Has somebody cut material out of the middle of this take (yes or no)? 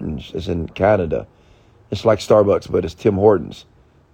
no